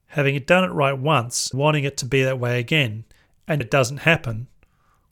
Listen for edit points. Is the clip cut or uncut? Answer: cut